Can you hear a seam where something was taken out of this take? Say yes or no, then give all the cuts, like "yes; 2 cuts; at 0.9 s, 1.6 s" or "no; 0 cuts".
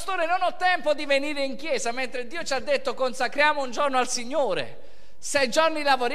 no; 0 cuts